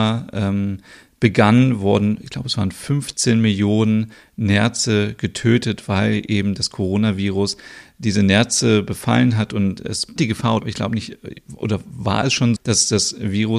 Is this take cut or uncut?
cut